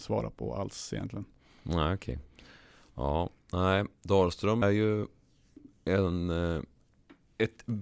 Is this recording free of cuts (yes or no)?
no